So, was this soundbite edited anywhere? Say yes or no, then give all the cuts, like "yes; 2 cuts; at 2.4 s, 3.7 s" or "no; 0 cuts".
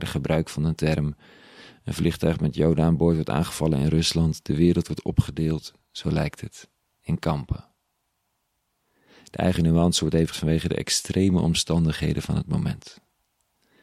yes; 1 cut; at 10.3 s